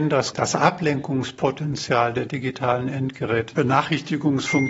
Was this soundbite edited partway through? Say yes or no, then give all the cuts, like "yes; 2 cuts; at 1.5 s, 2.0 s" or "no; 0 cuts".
yes; 1 cut; at 3.5 s